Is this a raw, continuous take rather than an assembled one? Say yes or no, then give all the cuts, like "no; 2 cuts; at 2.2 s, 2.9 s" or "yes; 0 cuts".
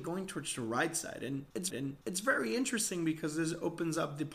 no; 1 cut; at 1.7 s